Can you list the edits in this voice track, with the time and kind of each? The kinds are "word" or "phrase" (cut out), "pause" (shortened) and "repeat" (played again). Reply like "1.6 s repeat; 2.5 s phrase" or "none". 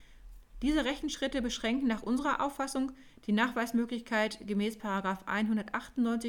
none